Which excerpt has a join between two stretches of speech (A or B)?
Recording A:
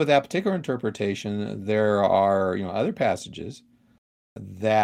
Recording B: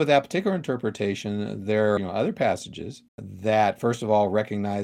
B